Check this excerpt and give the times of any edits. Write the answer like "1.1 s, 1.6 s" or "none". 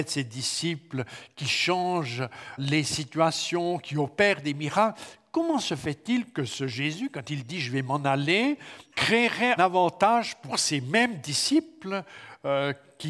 2.6 s, 8.9 s, 9.6 s